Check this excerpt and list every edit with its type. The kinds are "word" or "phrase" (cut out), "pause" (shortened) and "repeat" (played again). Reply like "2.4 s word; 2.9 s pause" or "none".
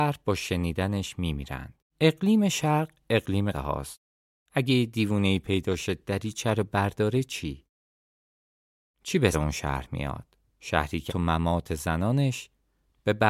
1.9 s pause; 3.5 s word; 4.2 s pause; 9.3 s word; 10.5 s pause; 11.1 s word

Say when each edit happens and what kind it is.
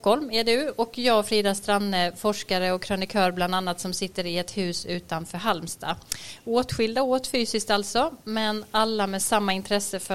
none

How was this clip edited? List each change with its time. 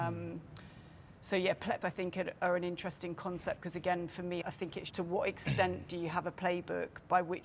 1.8 s word; 4.4 s word; 4.9 s word

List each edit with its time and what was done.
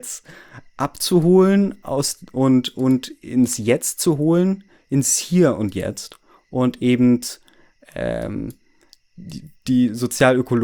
none

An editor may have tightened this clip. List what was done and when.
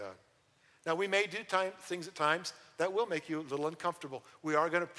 none

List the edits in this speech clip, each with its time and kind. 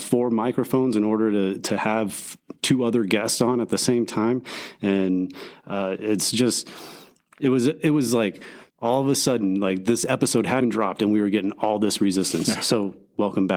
2.6 s pause; 8.7 s pause; 10.6 s word

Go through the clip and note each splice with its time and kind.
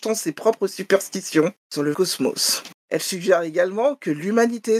1.9 s word

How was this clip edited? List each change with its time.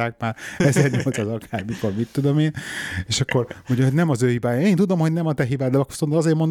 none

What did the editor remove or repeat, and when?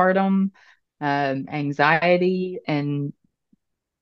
2.6 s word

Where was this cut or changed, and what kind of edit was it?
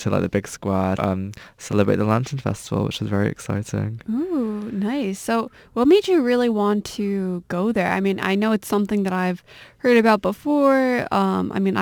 1.0 s word

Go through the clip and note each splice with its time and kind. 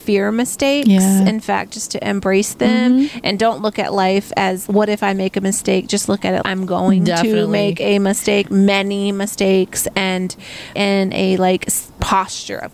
4.7 s word; 6.4 s word; 10.7 s phrase

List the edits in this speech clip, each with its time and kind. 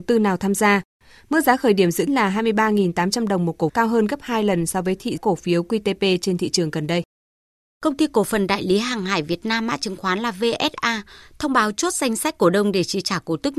2.1 s word; 3.7 s word; 5.2 s word

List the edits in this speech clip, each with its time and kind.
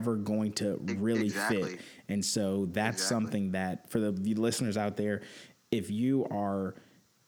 none

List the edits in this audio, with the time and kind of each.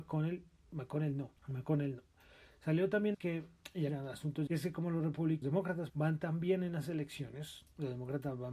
1.4 s pause; 3.1 s word; 3.9 s phrase; 4.5 s phrase; 5.4 s word; 5.9 s word

